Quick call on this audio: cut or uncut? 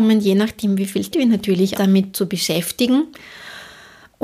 cut